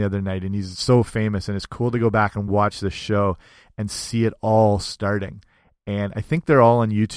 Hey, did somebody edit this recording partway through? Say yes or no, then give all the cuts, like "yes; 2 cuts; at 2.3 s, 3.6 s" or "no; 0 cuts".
no; 0 cuts